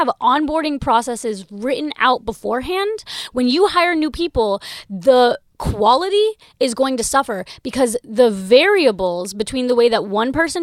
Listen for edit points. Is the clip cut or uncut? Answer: uncut